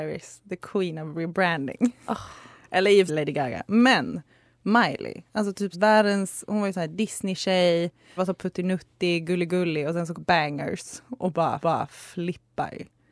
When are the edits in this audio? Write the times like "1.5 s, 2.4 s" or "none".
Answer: 3.1 s, 5.7 s, 8.2 s, 10.1 s, 11.6 s